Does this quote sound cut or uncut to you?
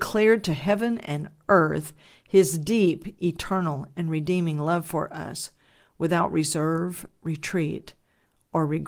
uncut